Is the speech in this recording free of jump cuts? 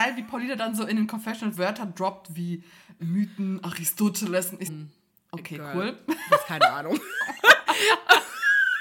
no; 3 cuts; at 1.5 s, 3.0 s, 4.7 s

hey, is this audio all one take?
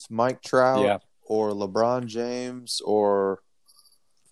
yes; 0 cuts

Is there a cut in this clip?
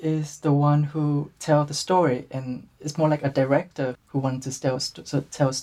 yes; 1 cut; at 3.9 s

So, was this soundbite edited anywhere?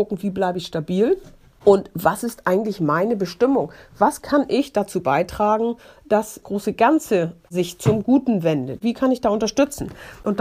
yes; 1 cut; at 6.4 s

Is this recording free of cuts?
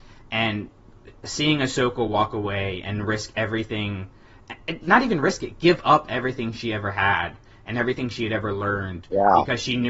yes; 0 cuts

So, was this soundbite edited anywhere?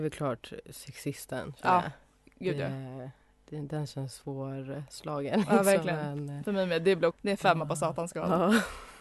yes; 1 cut; at 7.1 s

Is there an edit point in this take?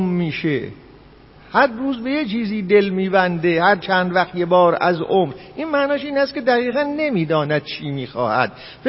no; 0 cuts

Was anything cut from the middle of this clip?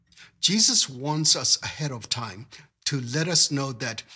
no; 0 cuts

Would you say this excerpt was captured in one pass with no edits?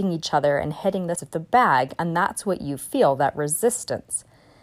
no; 1 cut; at 1.1 s

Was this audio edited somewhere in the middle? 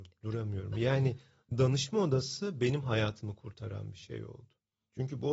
no; 0 cuts

